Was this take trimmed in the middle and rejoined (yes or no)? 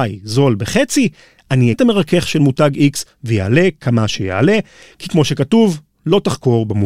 yes